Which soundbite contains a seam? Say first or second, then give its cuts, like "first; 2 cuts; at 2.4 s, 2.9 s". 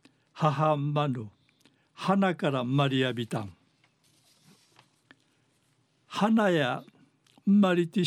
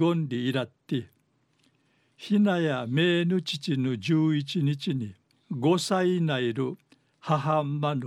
second; 1 cut; at 5.3 s